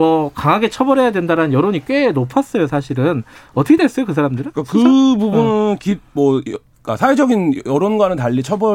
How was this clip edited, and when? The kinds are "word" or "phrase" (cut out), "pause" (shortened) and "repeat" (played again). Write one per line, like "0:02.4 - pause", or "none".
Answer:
none